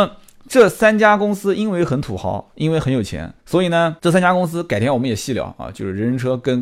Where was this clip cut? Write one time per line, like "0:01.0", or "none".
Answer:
0:03.4
0:04.0